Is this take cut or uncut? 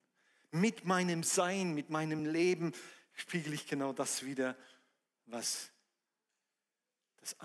uncut